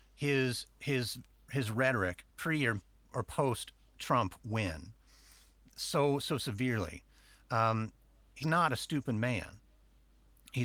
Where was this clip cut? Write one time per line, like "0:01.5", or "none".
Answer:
0:02.3
0:08.4